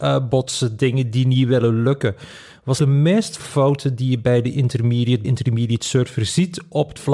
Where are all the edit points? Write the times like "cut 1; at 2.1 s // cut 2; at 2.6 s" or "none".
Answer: cut 1; at 2.8 s // cut 2; at 3.4 s // cut 3; at 5.2 s